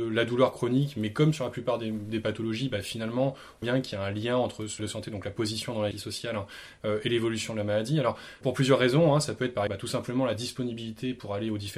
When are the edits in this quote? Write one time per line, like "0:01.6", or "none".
0:03.6
0:04.8
0:05.9
0:08.4
0:09.7